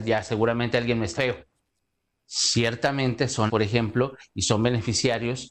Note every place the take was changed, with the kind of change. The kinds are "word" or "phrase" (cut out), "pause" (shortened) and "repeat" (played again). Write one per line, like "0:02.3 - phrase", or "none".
0:01.1 - word
0:03.5 - word